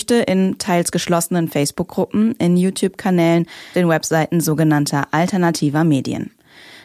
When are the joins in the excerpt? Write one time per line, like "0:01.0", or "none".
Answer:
0:03.7